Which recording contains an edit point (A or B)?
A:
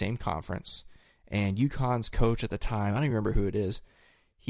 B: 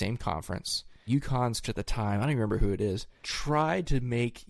B